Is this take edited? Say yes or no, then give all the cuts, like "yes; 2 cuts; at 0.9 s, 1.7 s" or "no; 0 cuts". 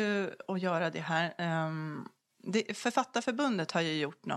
no; 0 cuts